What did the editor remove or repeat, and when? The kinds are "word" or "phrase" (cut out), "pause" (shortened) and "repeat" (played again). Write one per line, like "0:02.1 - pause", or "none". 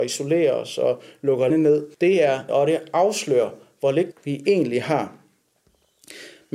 0:01.5 - word
0:01.9 - pause
0:02.5 - word
0:04.1 - word

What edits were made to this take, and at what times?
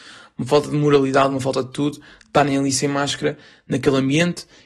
none

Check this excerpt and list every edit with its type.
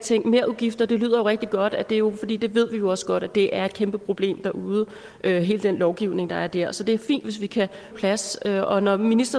0:07.9 - phrase

